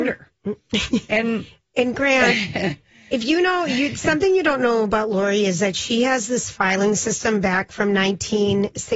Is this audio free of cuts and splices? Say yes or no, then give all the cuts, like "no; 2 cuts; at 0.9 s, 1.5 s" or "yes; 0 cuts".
yes; 0 cuts